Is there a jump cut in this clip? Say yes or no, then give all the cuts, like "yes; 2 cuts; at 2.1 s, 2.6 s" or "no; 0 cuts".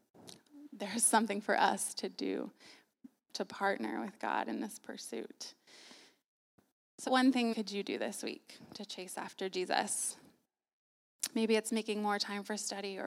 yes; 2 cuts; at 7.1 s, 7.5 s